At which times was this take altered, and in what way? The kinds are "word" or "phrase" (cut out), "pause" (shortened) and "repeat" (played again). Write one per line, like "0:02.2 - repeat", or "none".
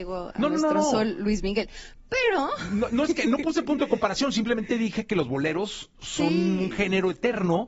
0:05.9 - pause